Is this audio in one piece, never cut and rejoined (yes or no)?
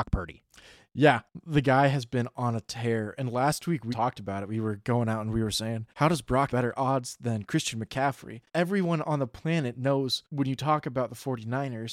no